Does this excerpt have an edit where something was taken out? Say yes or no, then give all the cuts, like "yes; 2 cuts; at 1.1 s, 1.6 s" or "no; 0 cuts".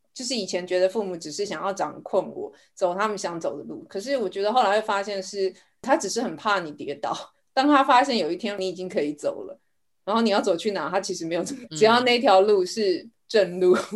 yes; 1 cut; at 11.7 s